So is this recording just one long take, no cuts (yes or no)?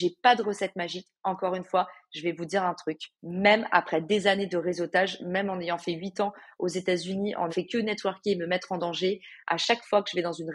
no